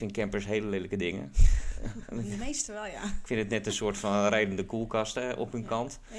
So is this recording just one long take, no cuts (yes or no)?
yes